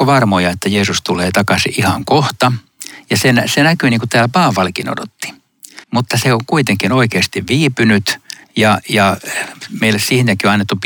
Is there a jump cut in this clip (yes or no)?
yes